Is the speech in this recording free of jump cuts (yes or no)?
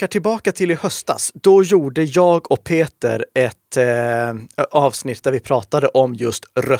yes